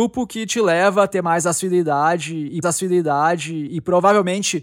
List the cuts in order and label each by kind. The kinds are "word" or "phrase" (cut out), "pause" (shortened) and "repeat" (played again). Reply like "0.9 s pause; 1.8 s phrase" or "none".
2.6 s repeat

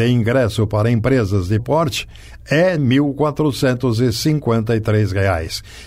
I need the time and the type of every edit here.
1.6 s word; 2.8 s word

